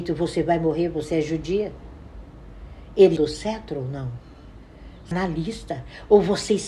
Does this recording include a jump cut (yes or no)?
yes